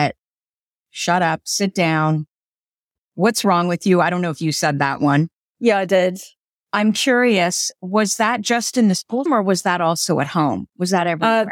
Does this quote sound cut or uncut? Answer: cut